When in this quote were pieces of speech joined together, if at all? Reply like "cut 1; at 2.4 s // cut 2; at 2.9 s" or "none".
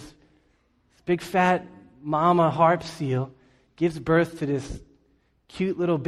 none